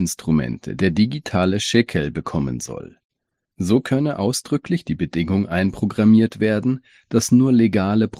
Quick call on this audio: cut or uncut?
uncut